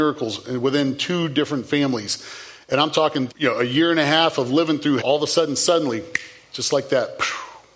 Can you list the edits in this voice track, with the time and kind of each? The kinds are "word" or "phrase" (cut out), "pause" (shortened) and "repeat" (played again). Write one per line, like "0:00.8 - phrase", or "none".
0:03.3 - phrase
0:05.0 - word